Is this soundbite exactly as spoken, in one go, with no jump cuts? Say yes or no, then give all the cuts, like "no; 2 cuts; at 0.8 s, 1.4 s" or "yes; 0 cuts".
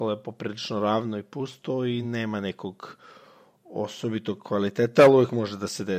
yes; 0 cuts